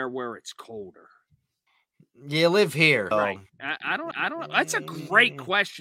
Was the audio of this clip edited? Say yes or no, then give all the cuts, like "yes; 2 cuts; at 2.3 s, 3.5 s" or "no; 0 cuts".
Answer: yes; 3 cuts; at 1.7 s, 3.1 s, 4.1 s